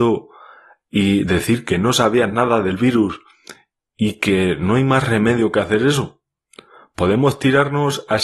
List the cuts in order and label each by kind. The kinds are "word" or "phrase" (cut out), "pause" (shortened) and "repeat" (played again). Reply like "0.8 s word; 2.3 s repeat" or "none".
none